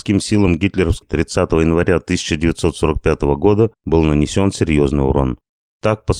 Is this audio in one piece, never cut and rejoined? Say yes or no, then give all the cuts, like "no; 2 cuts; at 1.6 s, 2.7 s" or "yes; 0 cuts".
no; 2 cuts; at 1.0 s, 3.7 s